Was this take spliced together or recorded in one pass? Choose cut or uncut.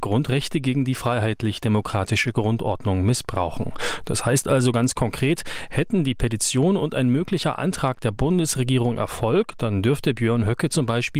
uncut